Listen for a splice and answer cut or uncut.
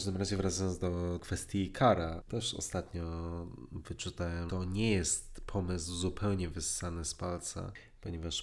cut